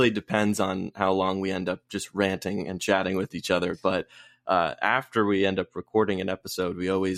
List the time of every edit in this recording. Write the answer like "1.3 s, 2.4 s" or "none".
none